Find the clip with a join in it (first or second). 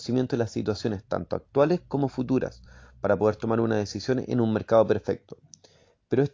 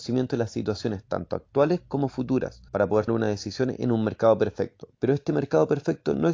second